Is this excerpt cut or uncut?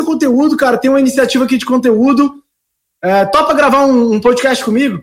uncut